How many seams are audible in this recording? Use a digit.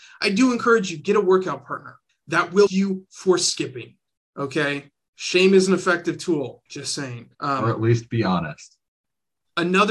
5